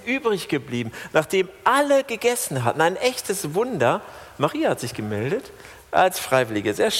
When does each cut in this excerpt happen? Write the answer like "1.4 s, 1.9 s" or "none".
none

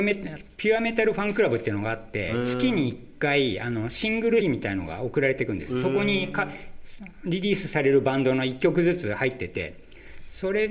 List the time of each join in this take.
4.4 s

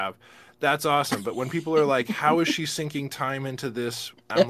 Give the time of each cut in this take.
none

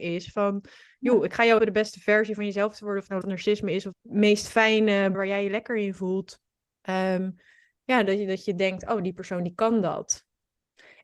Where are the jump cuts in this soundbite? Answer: 1.6 s, 3.2 s, 3.9 s, 5.1 s, 6.7 s

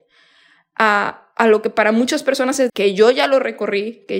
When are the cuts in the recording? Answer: 2.7 s

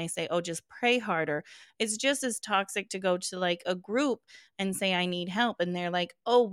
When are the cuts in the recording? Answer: none

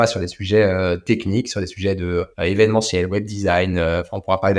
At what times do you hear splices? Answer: 2.3 s

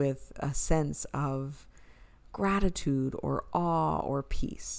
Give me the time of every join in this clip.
none

